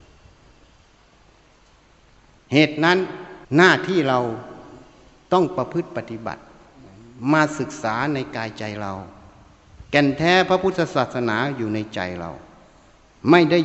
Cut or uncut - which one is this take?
cut